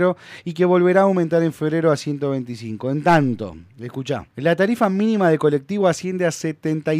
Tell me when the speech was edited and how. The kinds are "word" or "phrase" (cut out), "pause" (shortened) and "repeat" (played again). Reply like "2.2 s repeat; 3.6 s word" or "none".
4.3 s pause

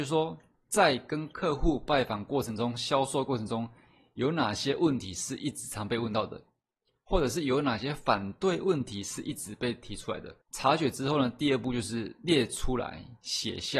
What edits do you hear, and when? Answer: 10.4 s pause

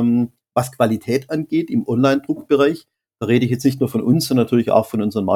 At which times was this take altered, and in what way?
none

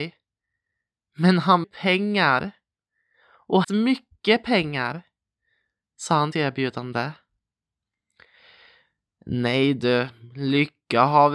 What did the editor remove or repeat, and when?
1.6 s phrase; 3.6 s word; 6.3 s phrase

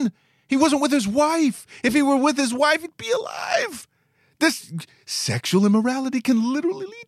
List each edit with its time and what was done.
none

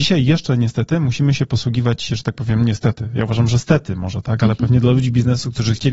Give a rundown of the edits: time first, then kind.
none

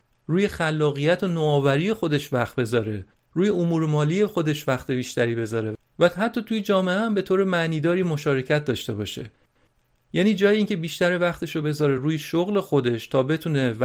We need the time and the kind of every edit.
none

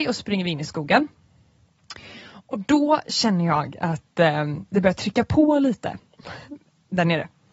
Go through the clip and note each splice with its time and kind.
none

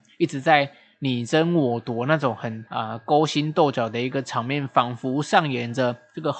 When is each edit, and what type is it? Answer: 2.7 s pause

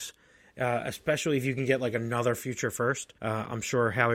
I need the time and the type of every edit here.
3.2 s pause

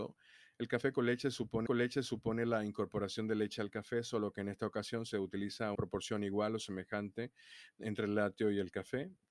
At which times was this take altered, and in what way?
1.7 s repeat; 5.8 s word

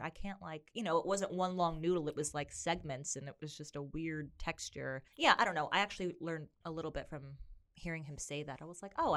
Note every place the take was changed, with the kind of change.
5.1 s pause; 6.5 s pause

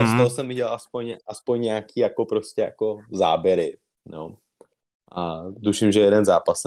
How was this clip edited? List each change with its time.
none

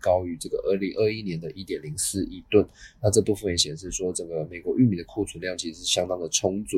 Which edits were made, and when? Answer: none

